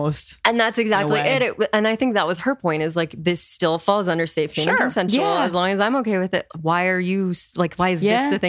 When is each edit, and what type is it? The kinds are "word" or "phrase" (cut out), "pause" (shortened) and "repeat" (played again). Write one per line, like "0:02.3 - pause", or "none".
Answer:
none